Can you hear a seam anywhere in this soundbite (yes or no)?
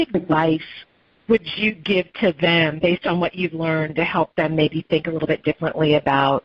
no